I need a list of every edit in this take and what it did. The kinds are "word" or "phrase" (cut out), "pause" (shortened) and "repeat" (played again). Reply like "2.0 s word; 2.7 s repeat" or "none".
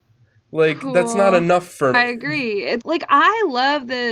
1.9 s phrase; 2.8 s word